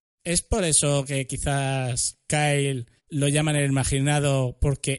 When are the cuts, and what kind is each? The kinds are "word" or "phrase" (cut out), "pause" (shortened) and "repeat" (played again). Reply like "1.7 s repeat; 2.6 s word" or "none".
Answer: 3.0 s pause